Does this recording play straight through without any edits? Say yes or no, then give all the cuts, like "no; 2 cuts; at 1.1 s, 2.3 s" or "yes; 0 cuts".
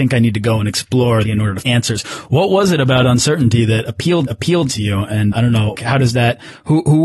no; 5 cuts; at 1.2 s, 1.6 s, 4.3 s, 5.3 s, 5.7 s